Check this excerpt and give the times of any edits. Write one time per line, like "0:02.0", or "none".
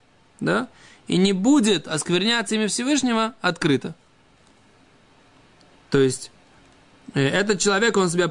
none